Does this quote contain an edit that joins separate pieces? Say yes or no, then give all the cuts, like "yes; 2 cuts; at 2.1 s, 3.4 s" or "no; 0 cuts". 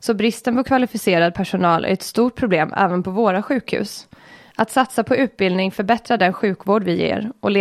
no; 0 cuts